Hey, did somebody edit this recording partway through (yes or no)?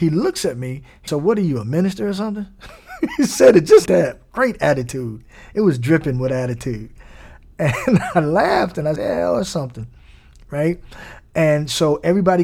yes